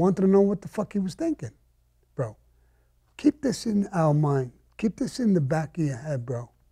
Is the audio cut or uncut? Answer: uncut